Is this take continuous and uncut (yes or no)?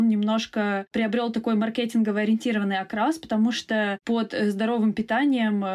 yes